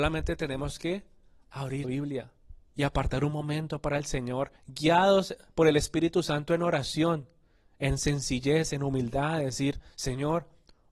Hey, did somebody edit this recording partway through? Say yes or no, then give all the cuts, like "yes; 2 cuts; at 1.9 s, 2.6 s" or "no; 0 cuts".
yes; 3 cuts; at 1.8 s, 4.6 s, 9.9 s